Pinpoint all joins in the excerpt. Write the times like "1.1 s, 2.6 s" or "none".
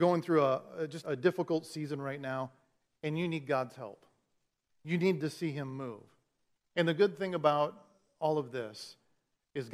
1.0 s